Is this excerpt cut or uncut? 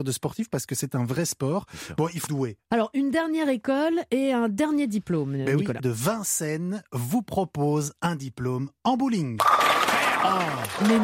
cut